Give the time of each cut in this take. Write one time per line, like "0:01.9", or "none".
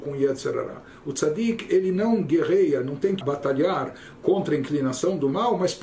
0:03.2